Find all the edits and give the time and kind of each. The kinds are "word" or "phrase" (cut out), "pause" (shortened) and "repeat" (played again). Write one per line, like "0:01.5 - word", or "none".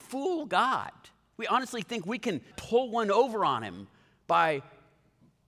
0:02.5 - word